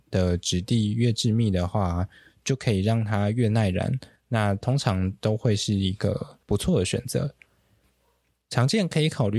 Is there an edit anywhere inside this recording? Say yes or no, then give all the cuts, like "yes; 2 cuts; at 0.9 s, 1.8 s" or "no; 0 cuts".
yes; 1 cut; at 6.4 s